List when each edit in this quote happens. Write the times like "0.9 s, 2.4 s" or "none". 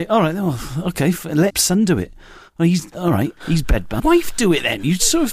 1.5 s, 3.4 s, 4.0 s